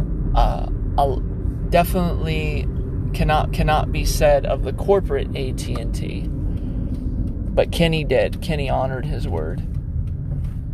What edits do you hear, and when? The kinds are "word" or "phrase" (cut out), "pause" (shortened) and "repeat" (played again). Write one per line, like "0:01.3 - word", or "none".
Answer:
0:03.5 - repeat